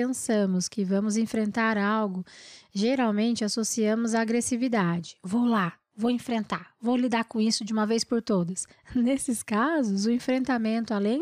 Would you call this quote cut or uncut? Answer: cut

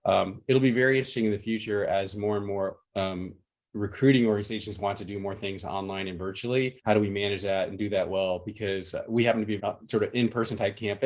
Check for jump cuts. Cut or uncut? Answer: cut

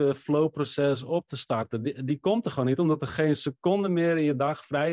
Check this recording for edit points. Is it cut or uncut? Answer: uncut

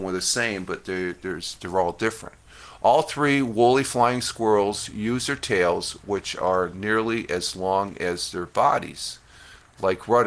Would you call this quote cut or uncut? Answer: uncut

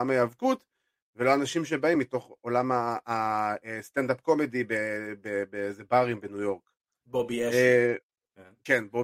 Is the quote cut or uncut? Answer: uncut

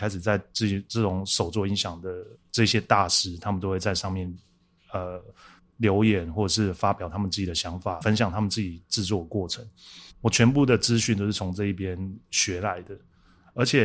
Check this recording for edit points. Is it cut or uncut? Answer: cut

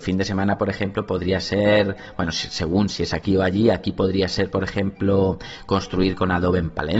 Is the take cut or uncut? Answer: uncut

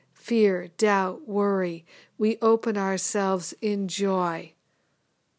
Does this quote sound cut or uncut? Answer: uncut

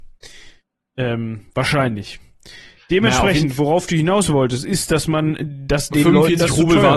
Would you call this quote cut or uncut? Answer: uncut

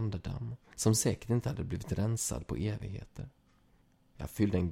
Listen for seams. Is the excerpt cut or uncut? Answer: uncut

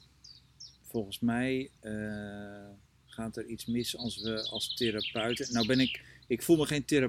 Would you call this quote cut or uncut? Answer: cut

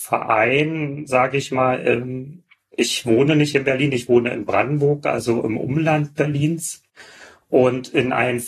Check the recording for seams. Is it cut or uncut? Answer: uncut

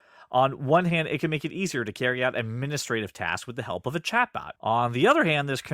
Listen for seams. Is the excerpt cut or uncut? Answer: cut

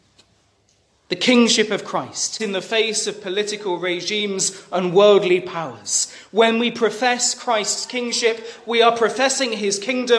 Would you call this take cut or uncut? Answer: cut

